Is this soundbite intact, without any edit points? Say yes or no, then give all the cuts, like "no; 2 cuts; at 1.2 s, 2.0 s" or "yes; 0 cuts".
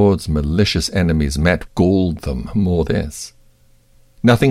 no; 2 cuts; at 1.7 s, 2.9 s